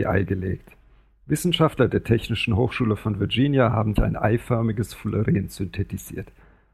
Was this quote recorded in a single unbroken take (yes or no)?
no